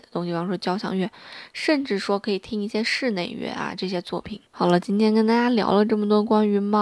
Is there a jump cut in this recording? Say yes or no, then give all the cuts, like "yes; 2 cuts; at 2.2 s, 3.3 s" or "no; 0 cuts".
yes; 1 cut; at 4.5 s